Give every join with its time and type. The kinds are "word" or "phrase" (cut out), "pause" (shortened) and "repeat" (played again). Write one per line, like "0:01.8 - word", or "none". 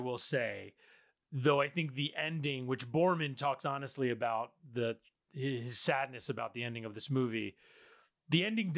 none